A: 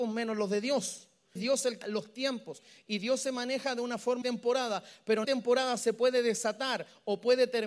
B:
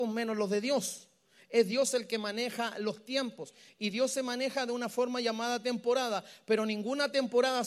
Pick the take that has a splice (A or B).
A